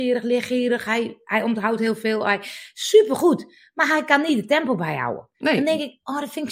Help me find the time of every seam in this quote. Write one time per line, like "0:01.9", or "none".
0:05.3